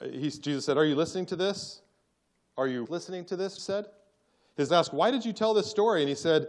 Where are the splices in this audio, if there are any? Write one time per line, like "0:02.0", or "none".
0:02.9
0:03.6
0:04.7